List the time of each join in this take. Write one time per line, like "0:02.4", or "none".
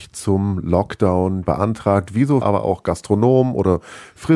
0:01.5
0:02.4

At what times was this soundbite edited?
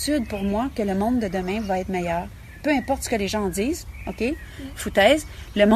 none

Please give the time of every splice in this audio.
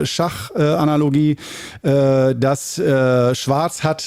none

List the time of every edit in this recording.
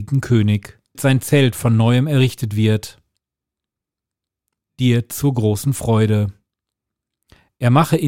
0:00.9

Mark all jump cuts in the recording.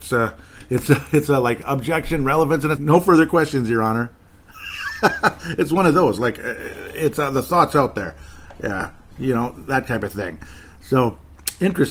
0:02.7

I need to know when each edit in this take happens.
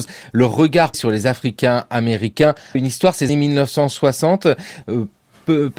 0:00.9
0:02.7
0:03.3

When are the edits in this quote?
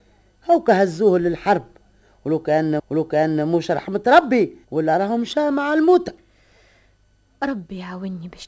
0:02.8
0:04.6

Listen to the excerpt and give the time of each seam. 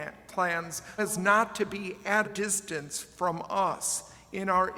0:01.0
0:02.2

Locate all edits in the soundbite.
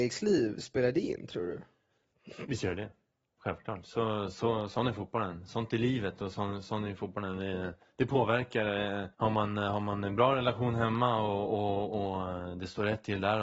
0:09.1

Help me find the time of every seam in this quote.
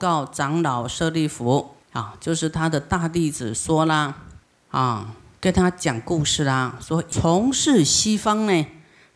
0:01.8
0:04.4

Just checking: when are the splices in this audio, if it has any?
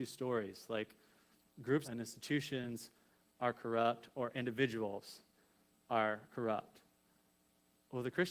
0:01.8

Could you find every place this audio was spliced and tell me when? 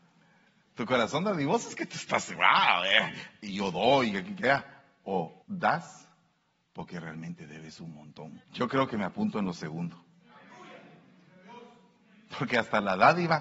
0:05.4
0:08.4

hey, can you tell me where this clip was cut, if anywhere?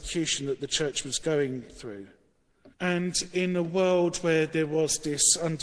0:02.7

